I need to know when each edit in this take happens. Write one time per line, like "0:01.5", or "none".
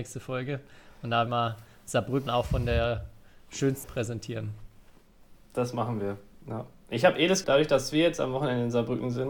0:01.3
0:02.3
0:03.8
0:07.4